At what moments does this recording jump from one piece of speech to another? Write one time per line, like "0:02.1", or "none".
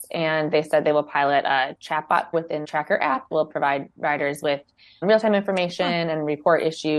0:02.3
0:02.6
0:03.3
0:05.0